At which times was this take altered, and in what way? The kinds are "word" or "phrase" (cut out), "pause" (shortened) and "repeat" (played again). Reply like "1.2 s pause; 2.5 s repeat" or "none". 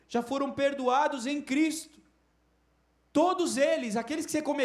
2.3 s pause